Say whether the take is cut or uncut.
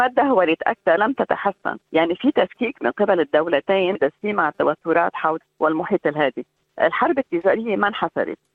cut